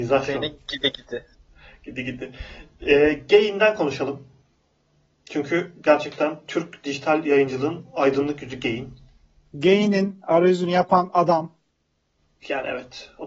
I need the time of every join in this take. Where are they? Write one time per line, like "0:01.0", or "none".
none